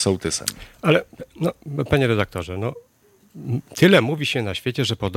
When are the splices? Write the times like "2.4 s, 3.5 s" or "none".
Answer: none